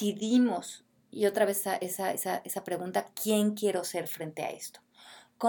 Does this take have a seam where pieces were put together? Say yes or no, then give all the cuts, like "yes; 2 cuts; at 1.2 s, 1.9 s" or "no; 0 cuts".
no; 0 cuts